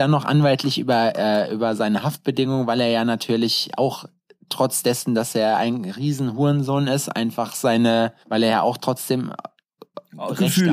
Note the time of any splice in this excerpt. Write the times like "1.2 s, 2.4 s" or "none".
8.2 s